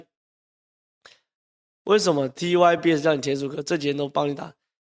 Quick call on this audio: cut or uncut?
uncut